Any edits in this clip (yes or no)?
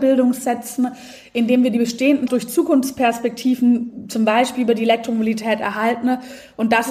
yes